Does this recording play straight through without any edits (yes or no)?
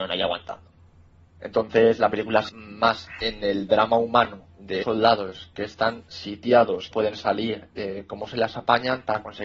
no